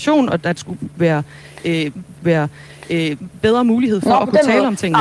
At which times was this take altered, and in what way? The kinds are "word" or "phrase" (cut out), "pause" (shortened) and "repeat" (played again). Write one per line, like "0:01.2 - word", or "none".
0:02.1 - repeat

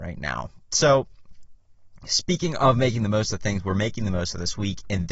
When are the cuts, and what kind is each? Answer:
none

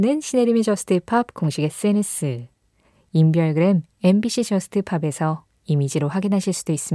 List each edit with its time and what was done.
none

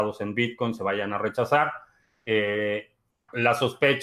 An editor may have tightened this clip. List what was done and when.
none

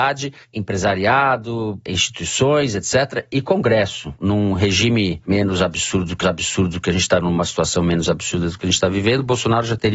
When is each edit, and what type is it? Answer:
0:06.2 - repeat
0:07.2 - word

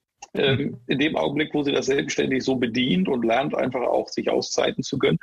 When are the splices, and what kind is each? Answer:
none

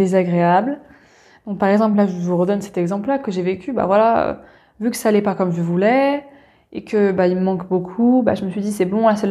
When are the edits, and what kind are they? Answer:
none

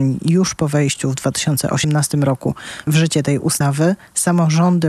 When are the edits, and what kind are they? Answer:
0:02.9 - word

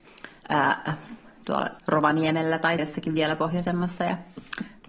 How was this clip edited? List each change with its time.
0:01.8 - word
0:02.8 - word

